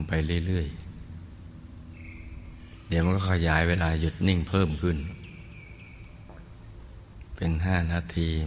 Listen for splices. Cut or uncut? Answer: uncut